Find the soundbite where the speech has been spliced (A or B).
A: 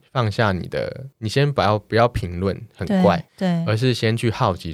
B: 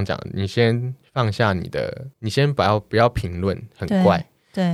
A